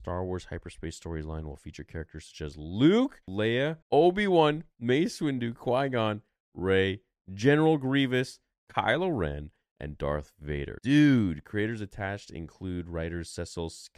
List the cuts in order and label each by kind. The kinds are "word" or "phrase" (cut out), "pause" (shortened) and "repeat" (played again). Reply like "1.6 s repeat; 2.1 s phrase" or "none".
3.8 s pause

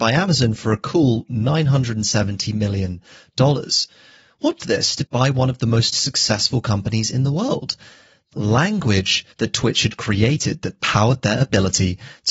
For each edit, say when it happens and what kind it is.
4.6 s word; 5.1 s phrase; 8.3 s word; 9.3 s pause

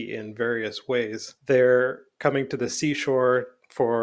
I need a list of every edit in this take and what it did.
1.4 s pause

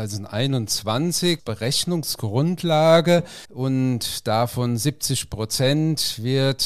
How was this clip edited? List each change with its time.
1.4 s word; 3.4 s pause

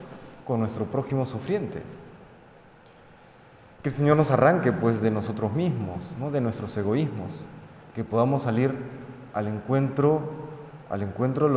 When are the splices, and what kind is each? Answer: none

